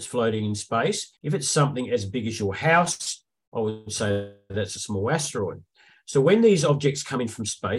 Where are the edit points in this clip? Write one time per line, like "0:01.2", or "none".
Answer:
0:01.2